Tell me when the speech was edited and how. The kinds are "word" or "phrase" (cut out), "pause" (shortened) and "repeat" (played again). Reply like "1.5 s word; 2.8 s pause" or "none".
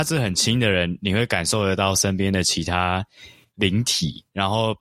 none

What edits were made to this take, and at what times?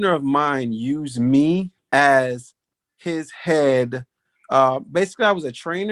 1.8 s pause

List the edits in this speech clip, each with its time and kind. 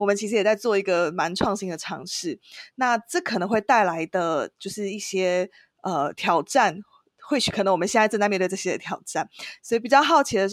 none

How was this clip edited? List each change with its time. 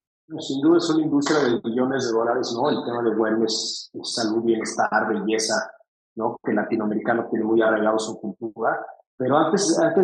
none

